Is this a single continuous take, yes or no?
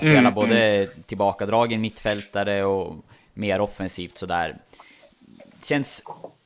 yes